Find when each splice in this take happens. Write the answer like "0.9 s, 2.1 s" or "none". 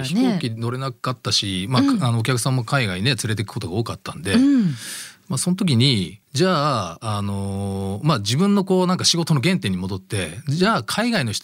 6.2 s